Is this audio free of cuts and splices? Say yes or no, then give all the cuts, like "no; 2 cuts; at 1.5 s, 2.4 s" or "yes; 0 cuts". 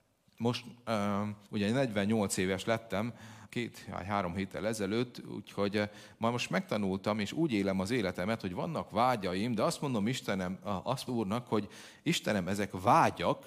no; 3 cuts; at 1.4 s, 3.5 s, 11.1 s